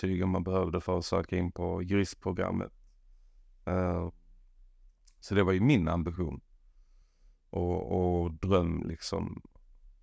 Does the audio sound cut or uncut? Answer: uncut